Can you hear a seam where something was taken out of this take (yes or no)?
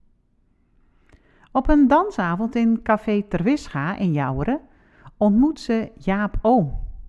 no